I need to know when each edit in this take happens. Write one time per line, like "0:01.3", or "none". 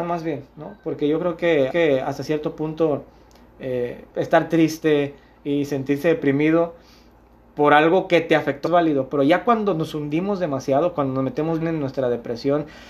0:01.7
0:04.1
0:08.7
0:11.6